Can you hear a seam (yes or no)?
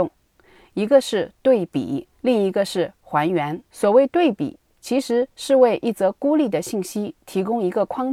yes